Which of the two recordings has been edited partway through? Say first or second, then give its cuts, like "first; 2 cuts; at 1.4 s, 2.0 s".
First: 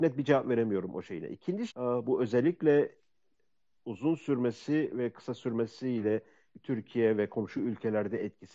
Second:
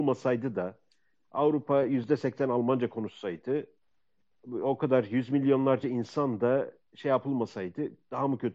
first; 2 cuts; at 1.7 s, 3.8 s